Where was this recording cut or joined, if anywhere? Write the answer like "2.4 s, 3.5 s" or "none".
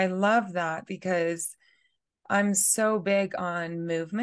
none